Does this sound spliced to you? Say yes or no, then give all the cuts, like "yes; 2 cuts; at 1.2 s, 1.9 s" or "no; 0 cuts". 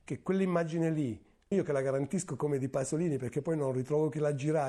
yes; 1 cut; at 1.5 s